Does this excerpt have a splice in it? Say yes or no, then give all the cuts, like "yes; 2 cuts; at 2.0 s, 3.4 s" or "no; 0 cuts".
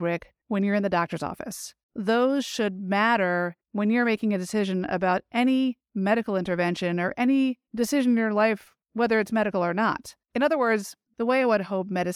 yes; 4 cuts; at 1.8 s, 3.6 s, 8.8 s, 10.2 s